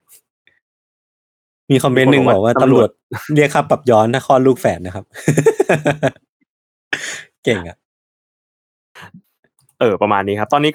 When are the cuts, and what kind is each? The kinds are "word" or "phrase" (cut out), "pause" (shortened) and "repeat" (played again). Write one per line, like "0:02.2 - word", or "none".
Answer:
none